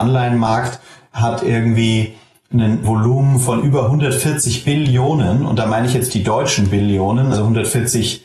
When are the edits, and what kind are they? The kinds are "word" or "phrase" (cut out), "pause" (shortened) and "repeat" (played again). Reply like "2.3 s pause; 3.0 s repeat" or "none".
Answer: 2.8 s word; 6.1 s word; 7.3 s word